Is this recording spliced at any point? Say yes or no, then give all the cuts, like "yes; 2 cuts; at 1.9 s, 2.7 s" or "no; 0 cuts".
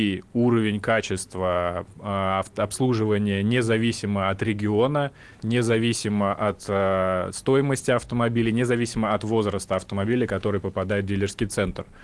no; 0 cuts